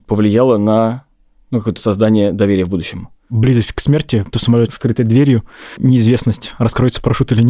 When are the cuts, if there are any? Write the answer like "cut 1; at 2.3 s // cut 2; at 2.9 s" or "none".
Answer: cut 1; at 1.8 s // cut 2; at 4.3 s